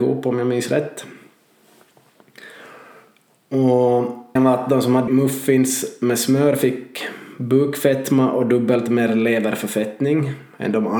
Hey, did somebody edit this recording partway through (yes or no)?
yes